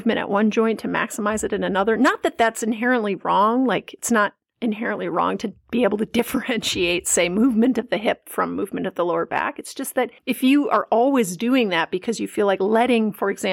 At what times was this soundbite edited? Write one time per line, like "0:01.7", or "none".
none